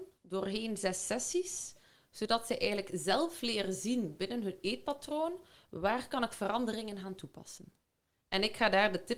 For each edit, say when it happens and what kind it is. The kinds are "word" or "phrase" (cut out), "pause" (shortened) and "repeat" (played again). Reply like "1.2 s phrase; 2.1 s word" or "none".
none